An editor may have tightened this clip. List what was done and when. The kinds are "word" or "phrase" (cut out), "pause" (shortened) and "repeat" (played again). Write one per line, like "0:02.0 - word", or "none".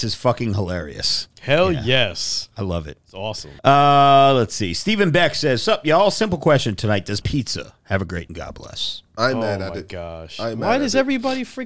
0:03.6 - pause
0:07.2 - phrase
0:08.3 - word

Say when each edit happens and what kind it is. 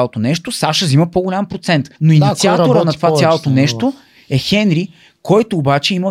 0:02.0 - pause

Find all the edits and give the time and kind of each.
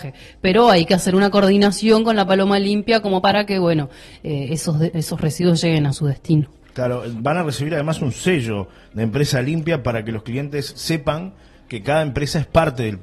none

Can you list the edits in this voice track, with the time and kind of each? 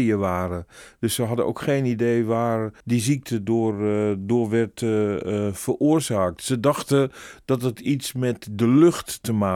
0:02.8 - pause

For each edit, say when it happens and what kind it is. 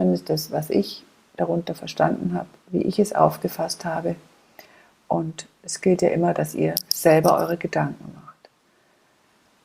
none

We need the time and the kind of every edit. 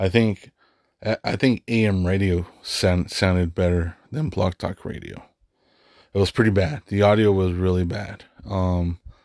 none

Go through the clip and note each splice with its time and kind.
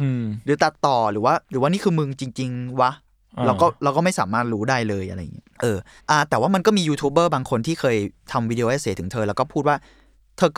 0:01.4 - pause
0:05.5 - pause
0:06.0 - pause

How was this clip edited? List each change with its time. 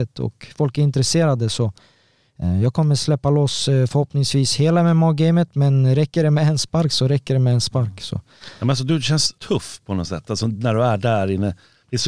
0:09.4 - pause

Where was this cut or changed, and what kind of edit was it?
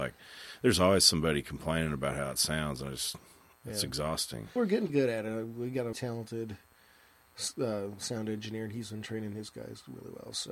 0:04.6 - word
0:04.9 - word
0:05.9 - word

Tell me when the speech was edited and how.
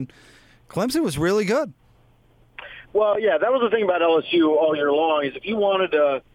none

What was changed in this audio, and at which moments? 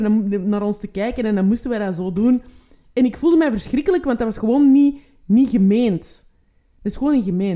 none

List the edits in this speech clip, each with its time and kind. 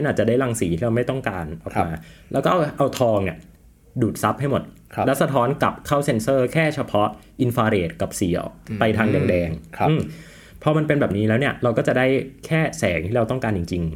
none

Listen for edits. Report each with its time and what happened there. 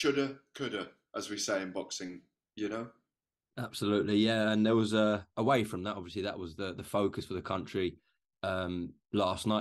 none

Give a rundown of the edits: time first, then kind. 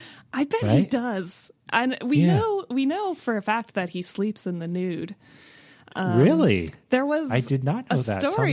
none

